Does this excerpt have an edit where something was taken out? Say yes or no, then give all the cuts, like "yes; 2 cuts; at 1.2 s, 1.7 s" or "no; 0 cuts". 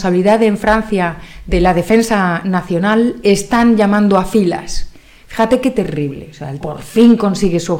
yes; 1 cut; at 6.6 s